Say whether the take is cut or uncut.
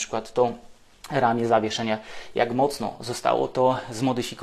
uncut